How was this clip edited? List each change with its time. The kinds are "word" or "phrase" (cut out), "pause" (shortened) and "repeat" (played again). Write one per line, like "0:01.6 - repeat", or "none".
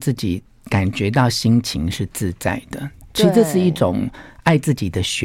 none